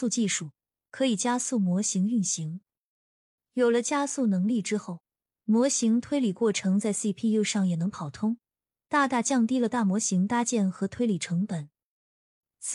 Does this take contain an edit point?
no; 0 cuts

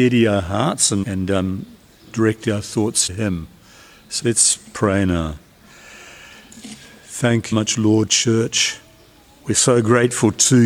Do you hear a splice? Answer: yes; 5 cuts; at 1.0 s, 3.1 s, 4.2 s, 7.5 s, 8.1 s

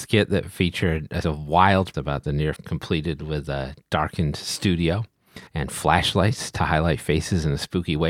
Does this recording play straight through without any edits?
no; 4 cuts; at 1.2 s, 1.9 s, 2.6 s, 5.5 s

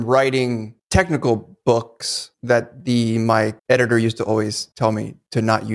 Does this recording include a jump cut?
no; 0 cuts

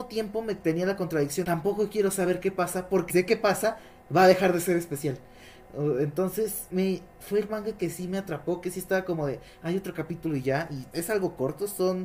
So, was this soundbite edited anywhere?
yes; 5 cuts; at 1.4 s, 3.1 s, 6.7 s, 7.5 s, 10.9 s

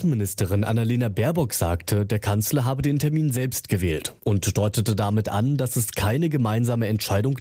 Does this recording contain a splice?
yes; 1 cut; at 4.2 s

